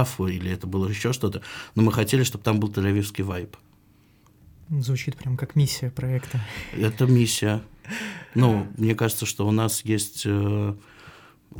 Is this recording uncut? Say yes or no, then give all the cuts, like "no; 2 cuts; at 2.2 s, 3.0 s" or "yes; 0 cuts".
yes; 0 cuts